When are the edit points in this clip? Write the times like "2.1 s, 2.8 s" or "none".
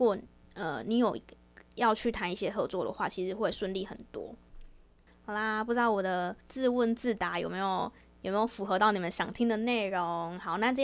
6.4 s